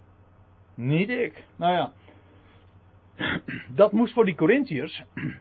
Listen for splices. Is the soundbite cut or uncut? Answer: cut